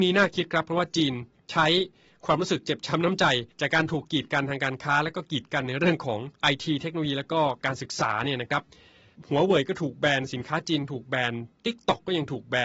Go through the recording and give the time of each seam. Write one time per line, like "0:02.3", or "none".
0:03.5
0:06.3